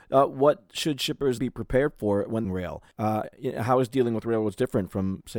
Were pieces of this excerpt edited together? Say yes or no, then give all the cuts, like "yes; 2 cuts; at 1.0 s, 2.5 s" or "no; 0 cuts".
yes; 3 cuts; at 1.4 s, 2.4 s, 2.9 s